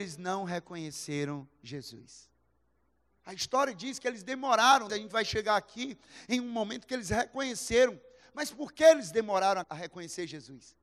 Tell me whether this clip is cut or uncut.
cut